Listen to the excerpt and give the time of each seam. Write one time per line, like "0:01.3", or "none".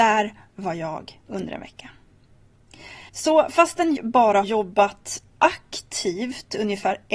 0:03.1
0:04.0
0:04.4
0:05.3